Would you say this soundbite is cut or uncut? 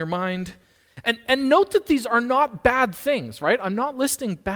uncut